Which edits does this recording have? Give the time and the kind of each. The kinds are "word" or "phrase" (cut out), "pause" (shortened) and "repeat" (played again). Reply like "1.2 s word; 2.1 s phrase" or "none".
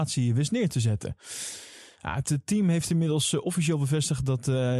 none